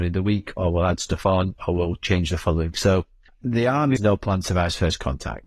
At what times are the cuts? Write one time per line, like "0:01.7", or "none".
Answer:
0:02.7
0:03.3
0:04.0